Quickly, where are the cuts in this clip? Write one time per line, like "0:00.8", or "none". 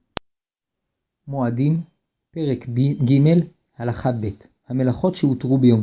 none